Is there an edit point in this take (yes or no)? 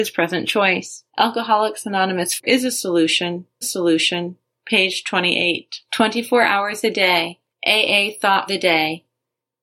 yes